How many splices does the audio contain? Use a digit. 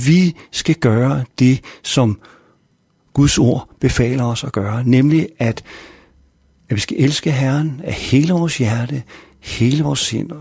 0